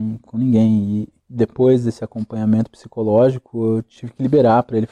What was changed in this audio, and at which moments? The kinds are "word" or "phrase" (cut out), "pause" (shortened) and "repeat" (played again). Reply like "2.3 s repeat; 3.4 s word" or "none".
none